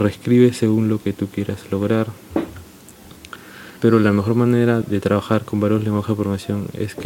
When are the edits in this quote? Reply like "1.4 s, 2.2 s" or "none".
3.8 s, 4.8 s